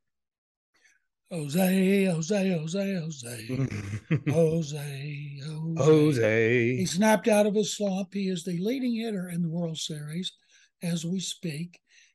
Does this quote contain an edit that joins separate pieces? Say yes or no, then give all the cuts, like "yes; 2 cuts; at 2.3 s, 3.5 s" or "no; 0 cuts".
no; 0 cuts